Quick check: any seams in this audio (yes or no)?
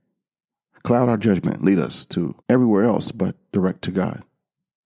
yes